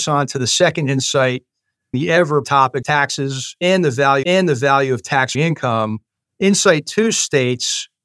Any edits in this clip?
yes; 5 cuts; at 1.9 s, 2.4 s, 2.8 s, 4.2 s, 5.3 s

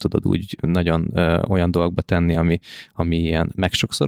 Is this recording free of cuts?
yes; 0 cuts

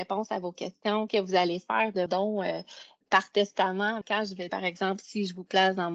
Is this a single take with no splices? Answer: no; 5 cuts; at 1.1 s, 2.1 s, 3.0 s, 4.0 s, 4.5 s

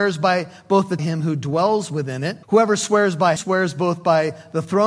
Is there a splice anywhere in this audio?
yes; 3 cuts; at 1.0 s, 2.4 s, 3.4 s

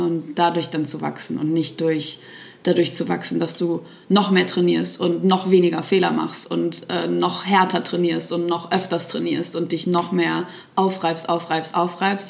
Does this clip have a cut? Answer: no; 0 cuts

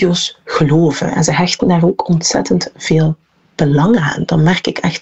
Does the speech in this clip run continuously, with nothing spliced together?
yes; 0 cuts

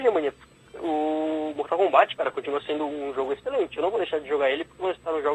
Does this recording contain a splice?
no; 0 cuts

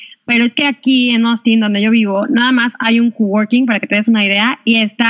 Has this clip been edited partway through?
no; 0 cuts

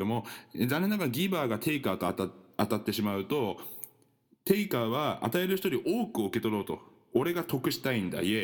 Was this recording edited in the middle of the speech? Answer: no; 0 cuts

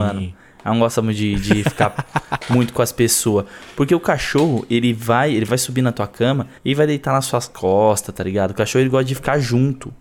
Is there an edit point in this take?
yes; 1 cut; at 6.6 s

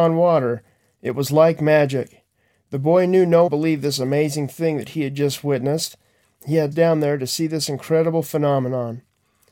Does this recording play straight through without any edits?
no; 2 cuts; at 3.5 s, 6.7 s

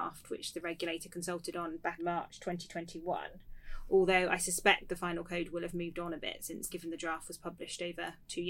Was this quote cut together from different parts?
yes; 2 cuts; at 2.0 s, 6.7 s

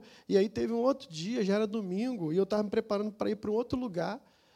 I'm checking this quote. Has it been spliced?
no; 0 cuts

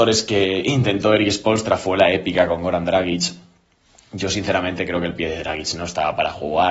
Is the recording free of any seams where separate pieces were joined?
yes; 0 cuts

